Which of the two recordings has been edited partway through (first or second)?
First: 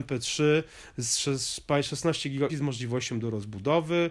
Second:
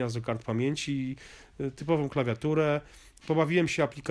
first